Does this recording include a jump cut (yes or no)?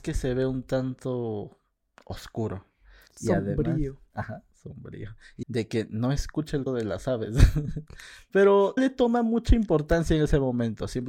yes